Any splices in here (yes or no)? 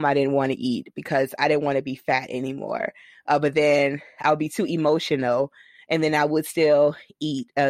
no